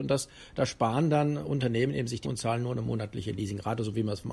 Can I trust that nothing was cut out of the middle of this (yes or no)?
no